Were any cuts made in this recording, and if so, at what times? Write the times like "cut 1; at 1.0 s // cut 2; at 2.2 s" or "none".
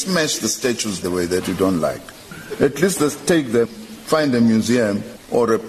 cut 1; at 1.0 s // cut 2; at 3.6 s